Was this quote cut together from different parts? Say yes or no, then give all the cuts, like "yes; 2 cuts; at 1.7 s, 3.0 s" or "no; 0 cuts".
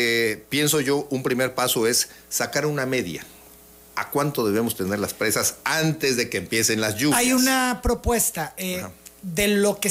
no; 0 cuts